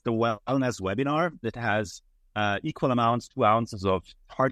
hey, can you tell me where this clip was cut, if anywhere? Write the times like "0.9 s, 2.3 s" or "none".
1.4 s